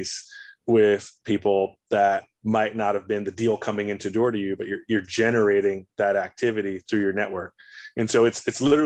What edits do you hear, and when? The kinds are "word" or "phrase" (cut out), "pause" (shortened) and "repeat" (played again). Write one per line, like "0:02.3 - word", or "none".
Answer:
0:02.3 - pause
0:06.9 - word